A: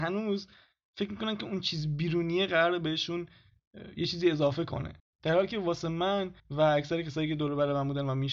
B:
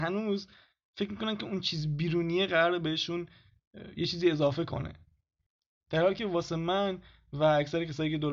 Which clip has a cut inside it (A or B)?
A